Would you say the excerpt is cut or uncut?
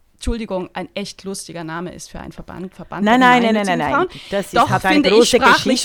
uncut